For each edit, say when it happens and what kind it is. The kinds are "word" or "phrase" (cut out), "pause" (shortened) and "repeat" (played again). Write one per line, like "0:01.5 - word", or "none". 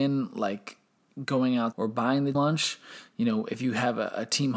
0:01.7 - phrase
0:02.3 - word